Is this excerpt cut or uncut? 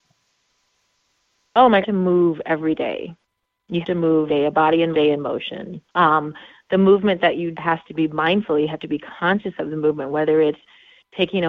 cut